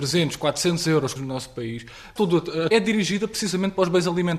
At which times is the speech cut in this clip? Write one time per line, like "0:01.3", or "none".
0:01.2
0:02.2
0:02.7